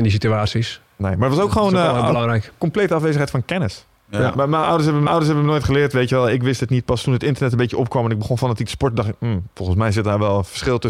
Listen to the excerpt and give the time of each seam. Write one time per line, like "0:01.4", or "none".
0:05.1